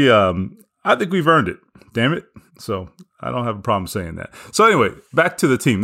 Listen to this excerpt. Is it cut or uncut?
cut